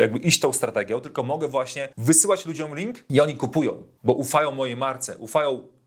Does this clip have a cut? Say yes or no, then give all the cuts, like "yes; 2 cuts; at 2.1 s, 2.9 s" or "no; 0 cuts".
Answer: yes; 1 cut; at 1.9 s